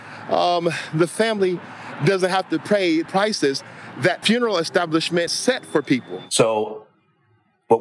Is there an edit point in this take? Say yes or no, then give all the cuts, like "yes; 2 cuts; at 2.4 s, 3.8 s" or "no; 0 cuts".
yes; 3 cuts; at 3.1 s, 4.2 s, 5.3 s